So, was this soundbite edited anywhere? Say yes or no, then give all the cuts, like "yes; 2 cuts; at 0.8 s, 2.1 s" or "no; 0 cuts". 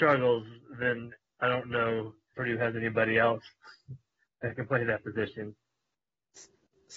yes; 1 cut; at 2.3 s